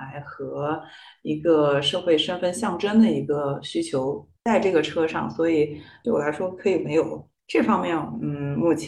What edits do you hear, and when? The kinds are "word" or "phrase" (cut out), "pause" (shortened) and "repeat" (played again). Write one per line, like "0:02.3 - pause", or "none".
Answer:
none